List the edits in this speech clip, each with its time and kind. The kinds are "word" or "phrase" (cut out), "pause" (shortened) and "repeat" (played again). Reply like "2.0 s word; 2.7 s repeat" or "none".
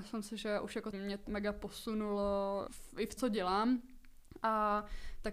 0.9 s word; 1.3 s word; 2.7 s word; 3.2 s word